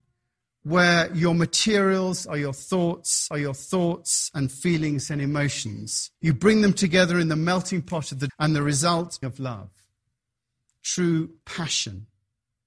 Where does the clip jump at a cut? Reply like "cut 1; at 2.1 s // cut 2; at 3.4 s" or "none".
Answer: cut 1; at 3.3 s // cut 2; at 6.2 s // cut 3; at 8.3 s // cut 4; at 9.2 s